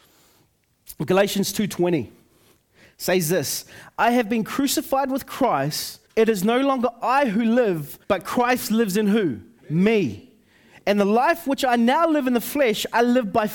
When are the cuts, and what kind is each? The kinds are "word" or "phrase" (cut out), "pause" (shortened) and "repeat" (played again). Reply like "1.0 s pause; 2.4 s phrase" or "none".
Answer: 6.1 s pause; 8.0 s pause; 9.6 s pause